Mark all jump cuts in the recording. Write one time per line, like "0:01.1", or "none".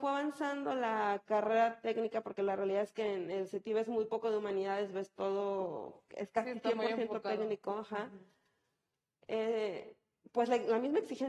none